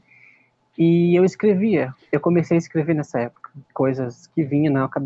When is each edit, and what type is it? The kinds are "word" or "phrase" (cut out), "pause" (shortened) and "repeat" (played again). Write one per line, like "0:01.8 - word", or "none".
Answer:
0:03.6 - pause